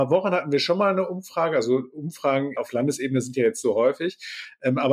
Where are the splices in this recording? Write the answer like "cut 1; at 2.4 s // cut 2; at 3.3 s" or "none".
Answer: cut 1; at 3.6 s